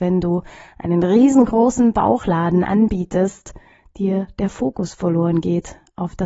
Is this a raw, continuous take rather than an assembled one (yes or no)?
yes